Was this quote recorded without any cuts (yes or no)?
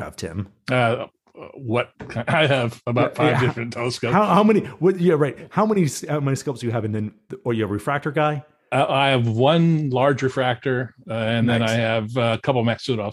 yes